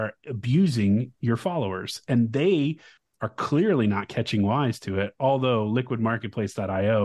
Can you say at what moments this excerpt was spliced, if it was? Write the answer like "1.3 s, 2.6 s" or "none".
none